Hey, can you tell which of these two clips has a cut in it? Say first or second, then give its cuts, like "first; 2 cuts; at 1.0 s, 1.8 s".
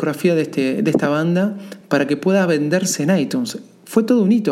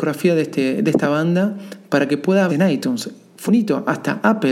second; 2 cuts; at 2.5 s, 3.5 s